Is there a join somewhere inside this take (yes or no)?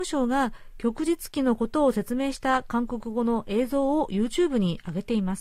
no